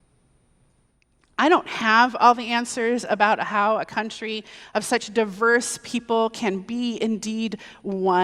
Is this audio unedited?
yes; 0 cuts

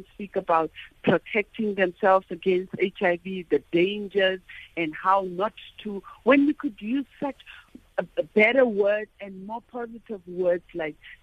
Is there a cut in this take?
no; 0 cuts

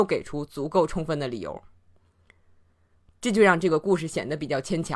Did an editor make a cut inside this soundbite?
no; 0 cuts

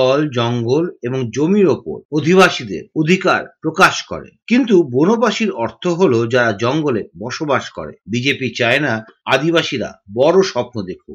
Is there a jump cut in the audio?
no; 0 cuts

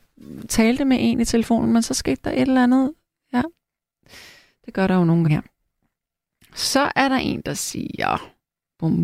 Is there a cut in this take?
yes; 1 cut; at 5.2 s

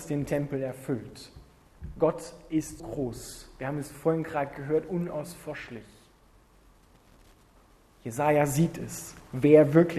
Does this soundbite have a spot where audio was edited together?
yes; 1 cut; at 2.8 s

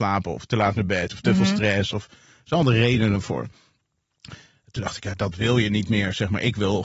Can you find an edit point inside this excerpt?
no; 0 cuts

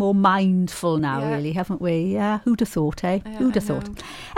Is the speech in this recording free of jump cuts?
yes; 0 cuts

